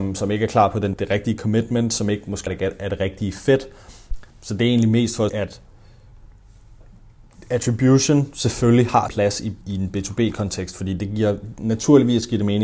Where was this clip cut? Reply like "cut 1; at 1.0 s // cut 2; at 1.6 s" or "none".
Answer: cut 1; at 0.9 s // cut 2; at 2.5 s // cut 3; at 4.3 s // cut 4; at 5.3 s // cut 5; at 9.1 s // cut 6; at 9.6 s